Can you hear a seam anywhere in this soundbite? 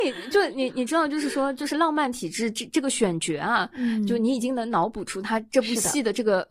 no; 0 cuts

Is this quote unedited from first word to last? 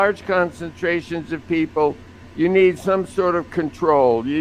yes; 0 cuts

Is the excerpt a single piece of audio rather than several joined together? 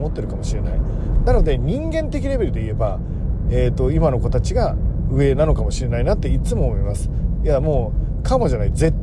yes; 0 cuts

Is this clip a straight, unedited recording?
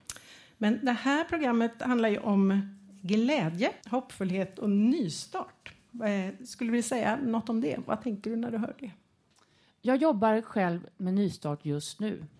no; 1 cut; at 3.8 s

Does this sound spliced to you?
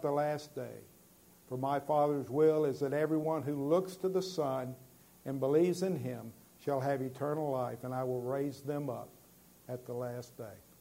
no; 0 cuts

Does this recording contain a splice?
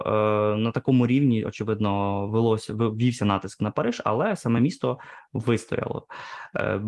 no; 0 cuts

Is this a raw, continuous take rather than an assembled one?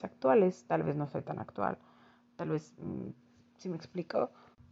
yes; 0 cuts

